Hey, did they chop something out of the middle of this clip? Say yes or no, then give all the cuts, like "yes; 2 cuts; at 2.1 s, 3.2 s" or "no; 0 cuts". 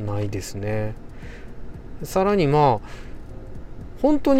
no; 0 cuts